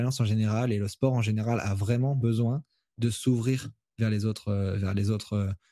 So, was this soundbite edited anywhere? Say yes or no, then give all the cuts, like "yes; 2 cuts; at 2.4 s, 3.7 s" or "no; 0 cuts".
no; 0 cuts